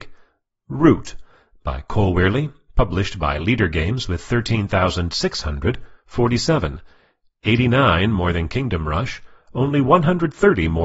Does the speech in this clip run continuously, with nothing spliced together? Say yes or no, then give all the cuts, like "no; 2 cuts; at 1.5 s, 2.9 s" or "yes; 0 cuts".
yes; 0 cuts